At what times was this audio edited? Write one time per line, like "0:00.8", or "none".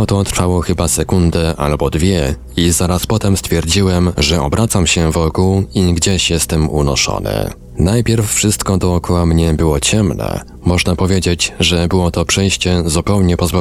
none